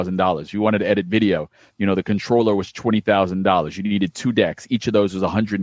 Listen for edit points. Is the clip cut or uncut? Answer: uncut